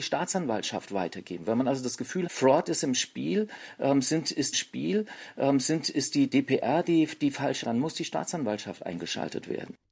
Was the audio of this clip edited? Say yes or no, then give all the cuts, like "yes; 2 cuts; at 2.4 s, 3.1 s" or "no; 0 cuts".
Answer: yes; 3 cuts; at 2.3 s, 4.5 s, 7.6 s